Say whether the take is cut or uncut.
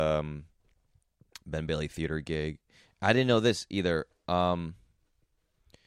uncut